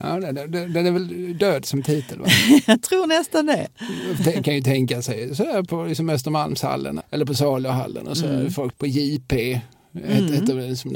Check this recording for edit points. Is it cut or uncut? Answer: cut